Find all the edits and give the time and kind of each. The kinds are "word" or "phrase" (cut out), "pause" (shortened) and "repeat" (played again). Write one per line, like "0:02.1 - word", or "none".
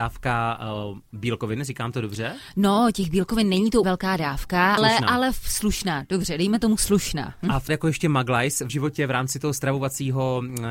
0:03.8 - word
0:04.8 - word
0:07.7 - phrase
0:08.7 - word